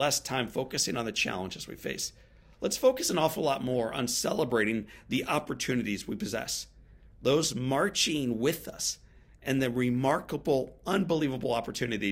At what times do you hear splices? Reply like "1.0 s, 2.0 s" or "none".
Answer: none